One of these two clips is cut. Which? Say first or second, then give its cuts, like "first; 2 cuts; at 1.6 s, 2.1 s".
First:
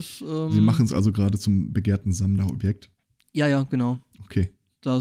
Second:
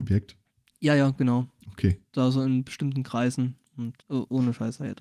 second; 2 cuts; at 2.1 s, 4.0 s